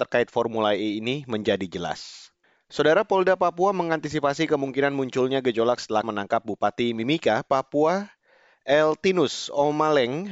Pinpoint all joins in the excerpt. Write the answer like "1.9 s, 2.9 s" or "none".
6.0 s

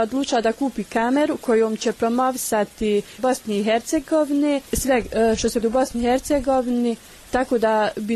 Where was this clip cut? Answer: 3.2 s, 4.6 s, 5.6 s

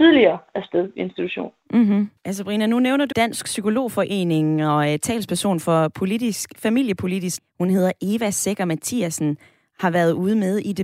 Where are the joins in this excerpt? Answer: 2.2 s, 3.1 s, 7.4 s

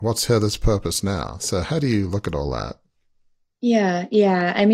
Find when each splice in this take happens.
none

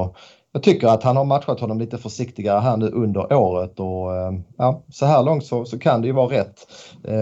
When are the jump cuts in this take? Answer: none

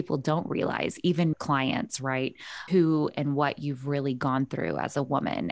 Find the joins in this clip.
1.3 s, 2.7 s

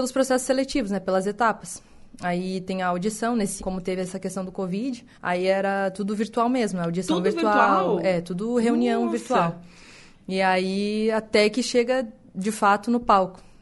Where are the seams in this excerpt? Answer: 3.6 s, 5.1 s

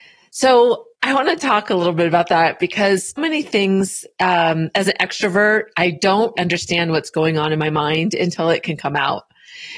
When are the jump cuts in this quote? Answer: 0.9 s, 3.2 s, 6.4 s

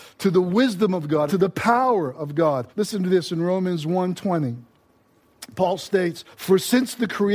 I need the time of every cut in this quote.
1.3 s, 2.7 s, 6.3 s

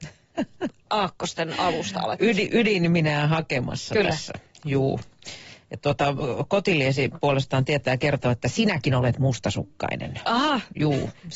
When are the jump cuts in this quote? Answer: none

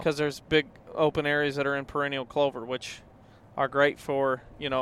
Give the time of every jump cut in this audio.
none

